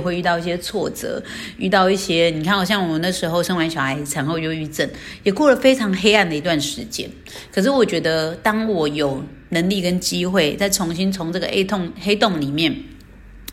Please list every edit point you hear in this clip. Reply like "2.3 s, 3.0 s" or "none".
none